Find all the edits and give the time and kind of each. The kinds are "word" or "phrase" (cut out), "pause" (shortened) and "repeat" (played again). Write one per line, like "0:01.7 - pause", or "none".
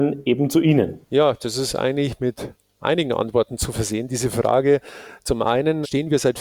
0:01.0 - pause